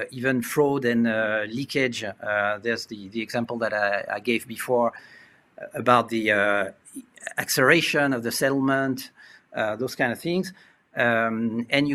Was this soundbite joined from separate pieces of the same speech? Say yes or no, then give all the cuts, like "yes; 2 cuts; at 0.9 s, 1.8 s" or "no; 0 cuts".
no; 0 cuts